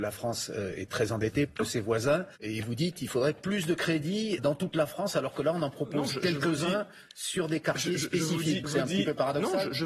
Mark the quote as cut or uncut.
cut